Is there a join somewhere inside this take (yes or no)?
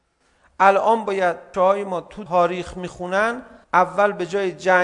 yes